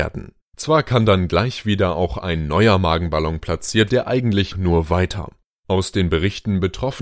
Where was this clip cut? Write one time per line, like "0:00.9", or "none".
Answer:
0:03.9
0:04.5